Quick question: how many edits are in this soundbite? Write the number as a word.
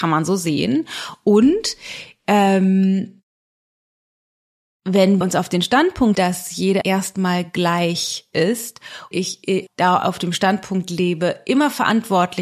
six